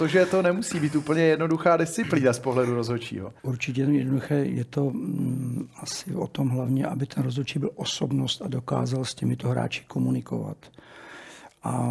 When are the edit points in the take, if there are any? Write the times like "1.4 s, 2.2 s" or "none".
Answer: 3.4 s